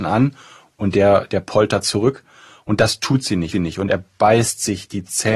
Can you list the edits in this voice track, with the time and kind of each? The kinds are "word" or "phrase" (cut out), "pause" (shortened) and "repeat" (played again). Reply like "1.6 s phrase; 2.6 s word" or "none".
3.5 s repeat